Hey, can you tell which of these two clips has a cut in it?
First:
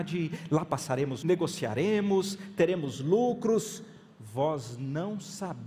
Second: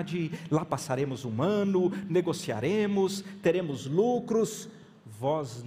first; 1 cut; at 1.2 s

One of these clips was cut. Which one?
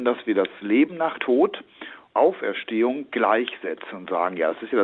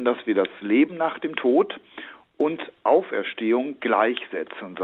first; 2 cuts; at 1.2 s, 2.1 s

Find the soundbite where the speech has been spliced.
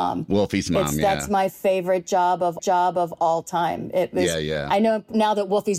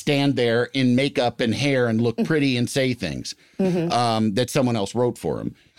first; 1 cut; at 2.6 s

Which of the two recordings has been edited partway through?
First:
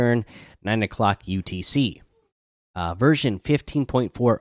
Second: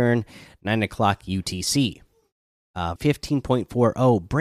second; 1 cut; at 3.0 s

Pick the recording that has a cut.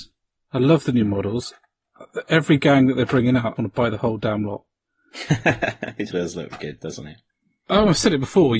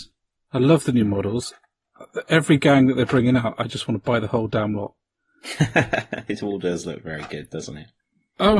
first; 3 cuts; at 3.6 s, 6.1 s, 6.5 s

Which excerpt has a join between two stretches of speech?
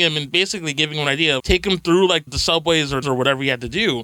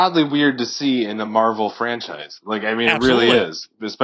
first; 3 cuts; at 1.4 s, 2.3 s, 3.0 s

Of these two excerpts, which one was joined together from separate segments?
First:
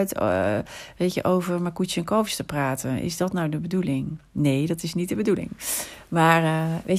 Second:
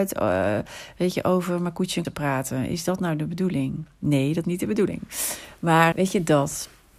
second; 3 cuts; at 2.0 s, 4.4 s, 5.9 s

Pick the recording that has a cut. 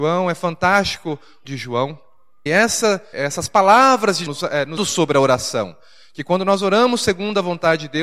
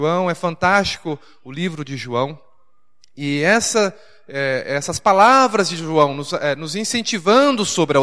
first; 5 cuts; at 1.4 s, 2.5 s, 3.1 s, 4.3 s, 4.8 s

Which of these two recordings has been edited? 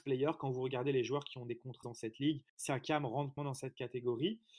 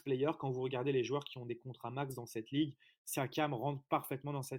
first; 3 cuts; at 1.8 s, 2.5 s, 3.4 s

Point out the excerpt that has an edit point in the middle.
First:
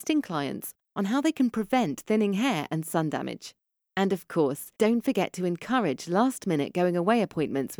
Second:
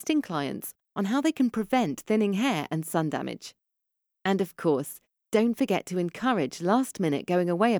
first; 2 cuts; at 3.8 s, 4.7 s

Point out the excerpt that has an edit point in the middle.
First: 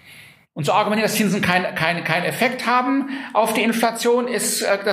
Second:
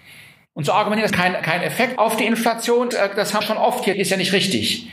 second; 6 cuts; at 1.1 s, 1.4 s, 2.0 s, 2.9 s, 3.4 s, 3.9 s

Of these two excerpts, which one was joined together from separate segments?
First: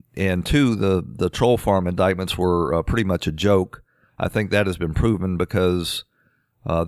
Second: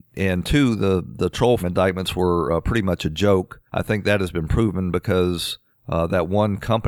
second; 3 cuts; at 1.6 s, 3.7 s, 5.7 s

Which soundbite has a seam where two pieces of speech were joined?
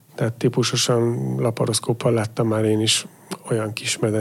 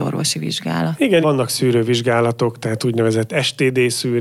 second; 1 cut; at 1.2 s

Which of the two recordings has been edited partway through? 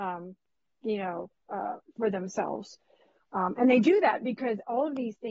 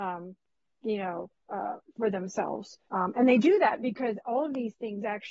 second; 1 cut; at 2.9 s

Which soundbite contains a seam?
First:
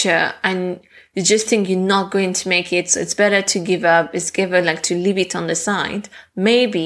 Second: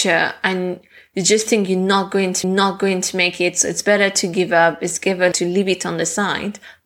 second; 2 cuts; at 2.4 s, 5.3 s

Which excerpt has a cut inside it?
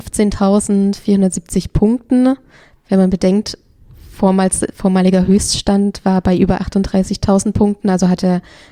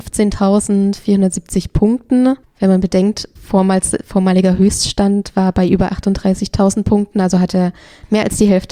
second; 2 cuts; at 2.4 s, 3.4 s

